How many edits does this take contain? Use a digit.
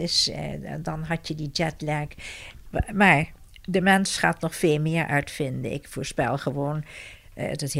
0